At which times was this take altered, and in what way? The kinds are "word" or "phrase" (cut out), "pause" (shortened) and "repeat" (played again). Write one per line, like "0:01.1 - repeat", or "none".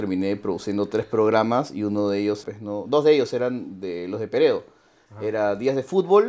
0:02.4 - word